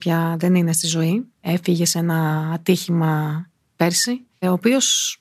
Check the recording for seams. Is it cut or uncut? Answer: uncut